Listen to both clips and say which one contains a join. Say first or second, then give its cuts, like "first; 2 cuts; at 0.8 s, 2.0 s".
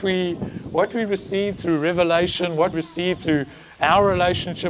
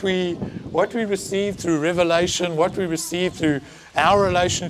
first; 1 cut; at 2.7 s